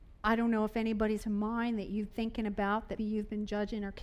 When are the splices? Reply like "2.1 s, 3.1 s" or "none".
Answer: 1.2 s, 2.1 s, 3.0 s

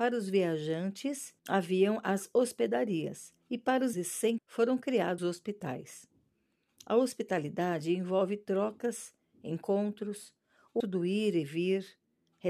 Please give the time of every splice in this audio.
1.4 s, 3.4 s, 3.9 s, 4.4 s, 5.2 s, 10.8 s

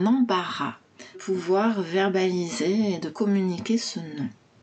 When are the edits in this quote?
1.1 s, 3.1 s

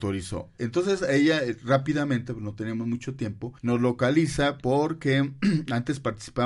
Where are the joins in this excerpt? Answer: 3.6 s

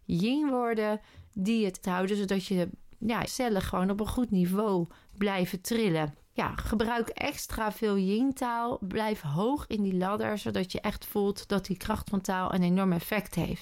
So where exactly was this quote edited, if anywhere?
1.8 s, 3.3 s

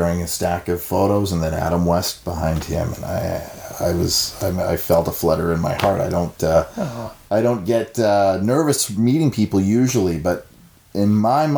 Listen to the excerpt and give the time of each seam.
none

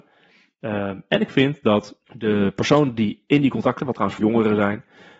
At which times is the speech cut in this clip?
2.1 s, 3.8 s, 4.2 s

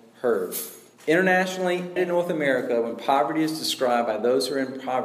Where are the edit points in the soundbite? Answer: 2.0 s

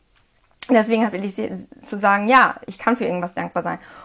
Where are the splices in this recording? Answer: 1.1 s

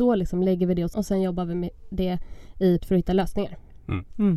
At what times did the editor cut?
0.9 s, 2.8 s

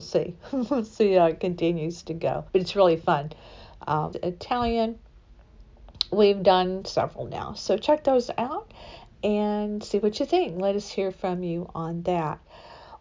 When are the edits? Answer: 2.5 s, 4.1 s

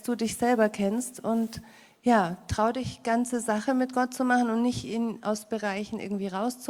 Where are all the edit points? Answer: none

